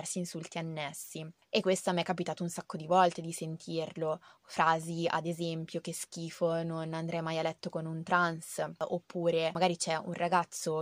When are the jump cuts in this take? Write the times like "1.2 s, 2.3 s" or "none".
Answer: none